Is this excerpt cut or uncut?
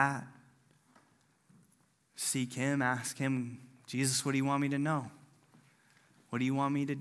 uncut